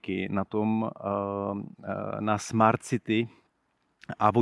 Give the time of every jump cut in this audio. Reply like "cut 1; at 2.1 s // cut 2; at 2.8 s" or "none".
none